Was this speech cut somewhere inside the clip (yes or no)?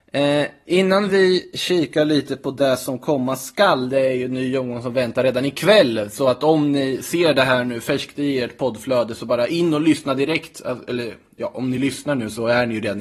no